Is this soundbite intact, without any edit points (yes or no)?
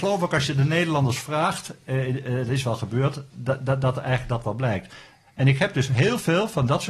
yes